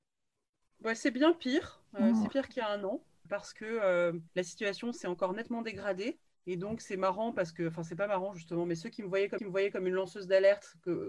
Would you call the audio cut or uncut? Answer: cut